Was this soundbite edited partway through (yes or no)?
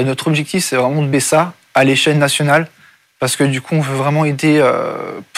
yes